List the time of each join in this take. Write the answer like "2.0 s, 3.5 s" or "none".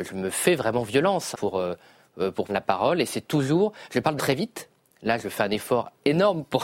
1.3 s, 2.5 s, 4.2 s